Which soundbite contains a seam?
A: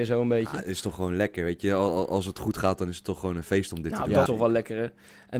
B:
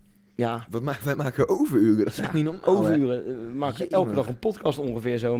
A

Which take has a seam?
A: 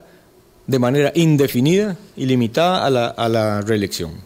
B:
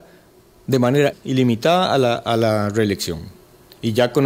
B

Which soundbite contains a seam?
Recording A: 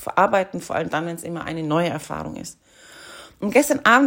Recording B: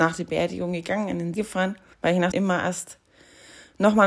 B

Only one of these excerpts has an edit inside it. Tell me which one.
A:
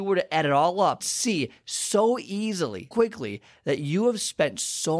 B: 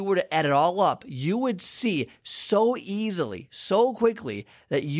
A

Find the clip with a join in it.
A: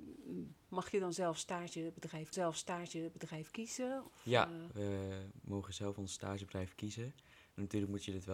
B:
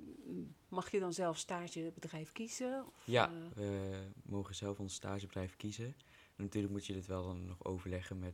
A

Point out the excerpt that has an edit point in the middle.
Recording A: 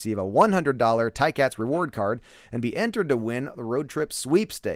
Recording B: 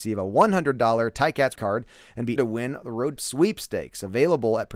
B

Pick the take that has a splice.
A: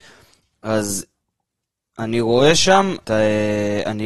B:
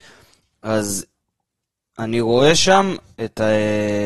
A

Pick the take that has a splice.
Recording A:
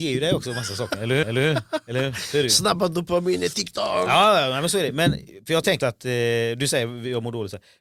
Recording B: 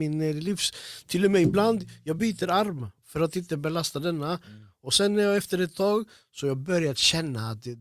A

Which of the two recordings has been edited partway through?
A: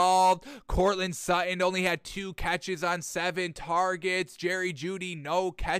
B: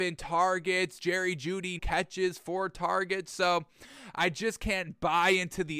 B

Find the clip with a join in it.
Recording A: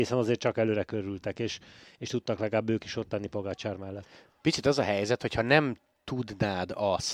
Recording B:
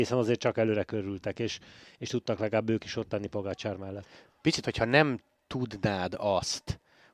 B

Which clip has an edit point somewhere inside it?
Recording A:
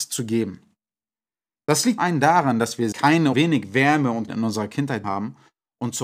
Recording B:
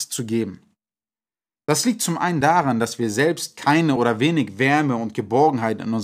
A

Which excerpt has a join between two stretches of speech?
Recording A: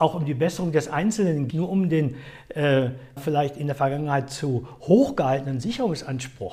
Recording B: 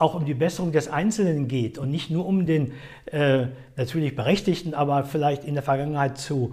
A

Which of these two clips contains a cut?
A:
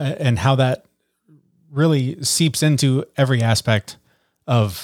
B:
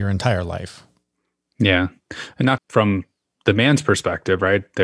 B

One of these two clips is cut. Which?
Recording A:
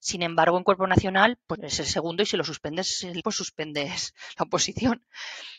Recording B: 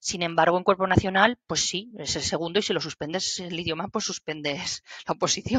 A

